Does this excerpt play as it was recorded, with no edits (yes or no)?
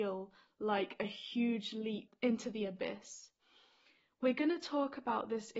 yes